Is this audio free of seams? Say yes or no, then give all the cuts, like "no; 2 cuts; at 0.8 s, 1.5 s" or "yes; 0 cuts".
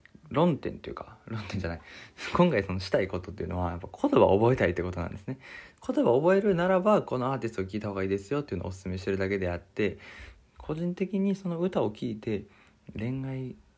yes; 0 cuts